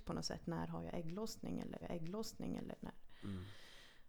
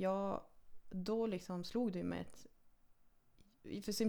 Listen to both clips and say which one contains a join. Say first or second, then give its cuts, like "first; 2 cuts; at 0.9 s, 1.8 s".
first; 1 cut; at 1.8 s